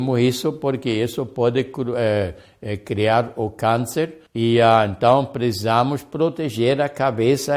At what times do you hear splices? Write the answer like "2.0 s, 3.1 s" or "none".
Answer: 4.3 s